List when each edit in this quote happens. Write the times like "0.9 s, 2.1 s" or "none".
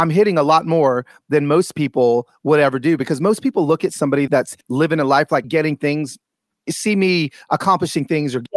4.3 s, 4.6 s, 5.4 s

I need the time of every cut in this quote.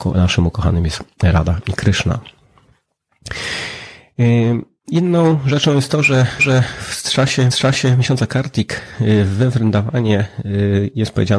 6.4 s, 7.5 s

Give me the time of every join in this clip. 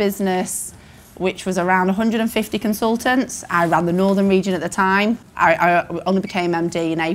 none

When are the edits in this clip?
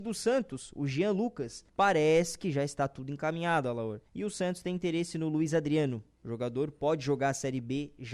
1.7 s, 4.1 s

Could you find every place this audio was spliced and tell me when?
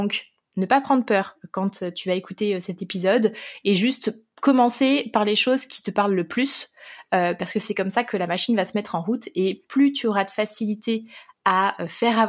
none

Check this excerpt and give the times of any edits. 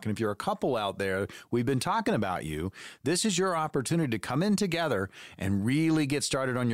none

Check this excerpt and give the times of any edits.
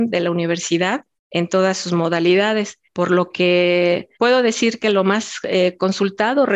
2.8 s, 4.1 s

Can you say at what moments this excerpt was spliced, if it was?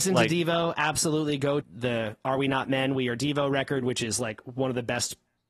1.6 s

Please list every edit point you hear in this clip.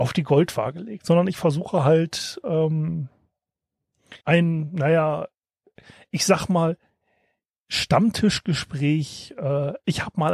4.2 s

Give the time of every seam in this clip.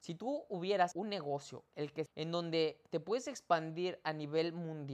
0.9 s, 2.1 s

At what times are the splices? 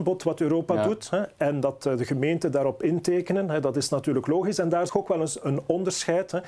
4.9 s

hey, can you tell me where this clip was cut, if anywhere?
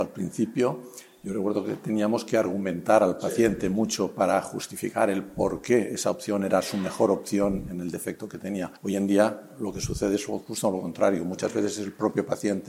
8.8 s

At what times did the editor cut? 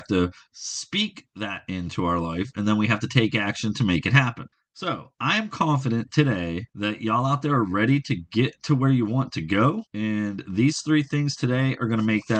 4.5 s, 6.7 s, 9.9 s

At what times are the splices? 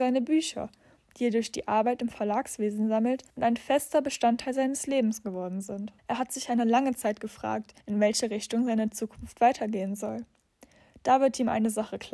3.3 s, 6.0 s, 7.8 s

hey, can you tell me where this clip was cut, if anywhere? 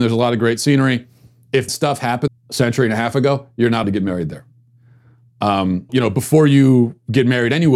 1.7 s, 2.3 s, 3.8 s, 5.9 s

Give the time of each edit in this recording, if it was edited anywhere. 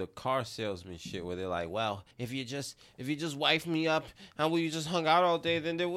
2.1 s

